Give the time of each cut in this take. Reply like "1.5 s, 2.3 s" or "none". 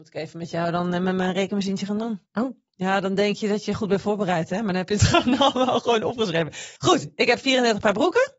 2.3 s, 6.8 s